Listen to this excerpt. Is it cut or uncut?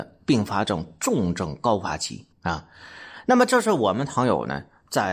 cut